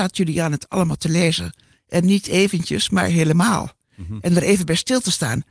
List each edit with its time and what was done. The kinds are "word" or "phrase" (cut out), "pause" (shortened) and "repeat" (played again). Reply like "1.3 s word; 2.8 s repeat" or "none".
none